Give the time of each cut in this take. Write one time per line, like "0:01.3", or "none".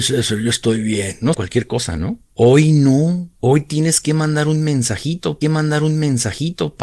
0:01.3
0:02.3
0:03.4
0:05.4